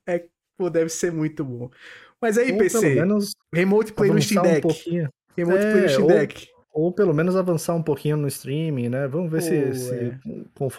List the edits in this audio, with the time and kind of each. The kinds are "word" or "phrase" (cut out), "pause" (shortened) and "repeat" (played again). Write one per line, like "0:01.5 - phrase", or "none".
0:03.4 - pause